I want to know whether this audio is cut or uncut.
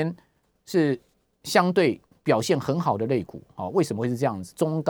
uncut